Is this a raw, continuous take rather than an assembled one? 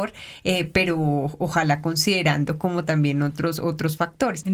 yes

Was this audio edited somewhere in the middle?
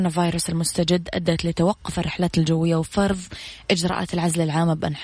no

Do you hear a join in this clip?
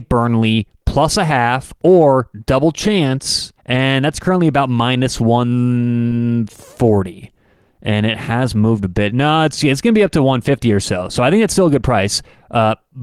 yes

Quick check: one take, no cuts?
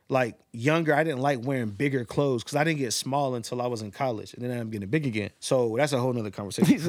no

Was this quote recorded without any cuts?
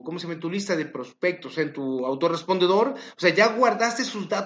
yes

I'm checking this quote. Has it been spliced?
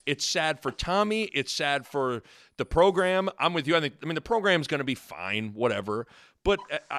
no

